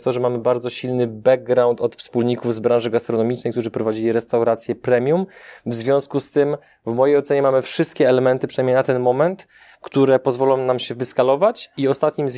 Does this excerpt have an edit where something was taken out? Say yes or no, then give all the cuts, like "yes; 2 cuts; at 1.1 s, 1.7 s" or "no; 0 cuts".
no; 0 cuts